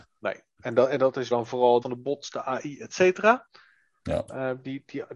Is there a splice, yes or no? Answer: yes